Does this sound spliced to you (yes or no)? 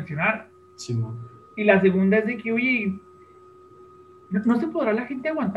no